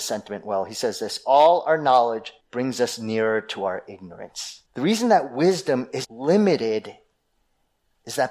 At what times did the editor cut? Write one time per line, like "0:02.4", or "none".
0:02.4
0:04.7
0:06.0